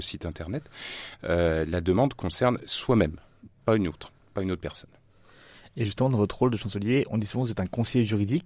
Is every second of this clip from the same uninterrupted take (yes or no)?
yes